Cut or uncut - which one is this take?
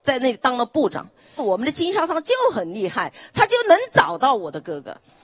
cut